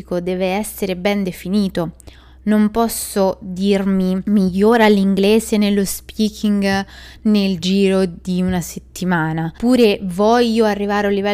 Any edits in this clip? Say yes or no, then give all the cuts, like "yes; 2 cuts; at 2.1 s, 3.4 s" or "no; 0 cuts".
no; 0 cuts